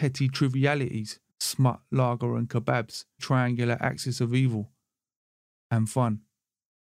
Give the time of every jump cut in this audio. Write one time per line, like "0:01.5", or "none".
0:01.3
0:03.2